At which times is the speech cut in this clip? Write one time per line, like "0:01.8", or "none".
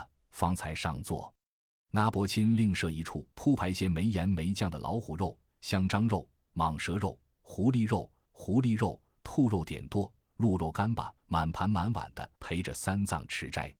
0:03.3
0:08.3
0:11.2
0:12.4